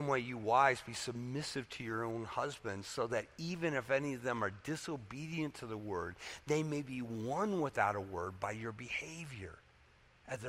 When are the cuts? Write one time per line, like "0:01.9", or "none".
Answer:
none